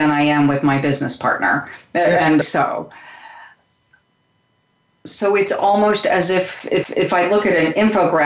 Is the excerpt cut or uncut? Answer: cut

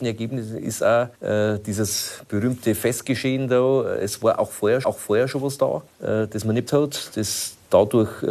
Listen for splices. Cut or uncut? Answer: cut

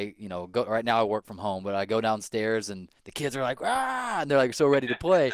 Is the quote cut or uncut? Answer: cut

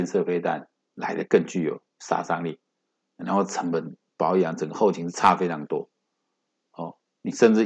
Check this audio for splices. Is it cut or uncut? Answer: cut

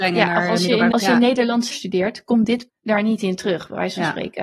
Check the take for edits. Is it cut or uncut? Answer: cut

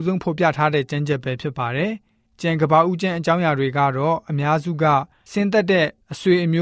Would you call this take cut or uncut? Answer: uncut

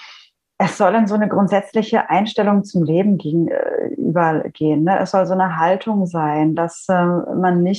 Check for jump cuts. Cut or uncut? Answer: uncut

